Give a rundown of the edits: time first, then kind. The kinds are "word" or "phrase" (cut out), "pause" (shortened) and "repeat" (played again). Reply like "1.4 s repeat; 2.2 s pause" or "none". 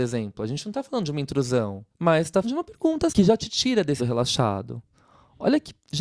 1.9 s pause; 2.4 s word; 3.1 s word; 4.0 s word